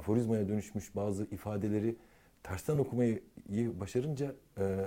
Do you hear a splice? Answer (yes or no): no